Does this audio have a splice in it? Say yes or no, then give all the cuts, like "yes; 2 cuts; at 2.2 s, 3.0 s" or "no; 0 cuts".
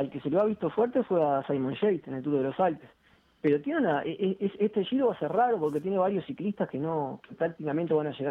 no; 0 cuts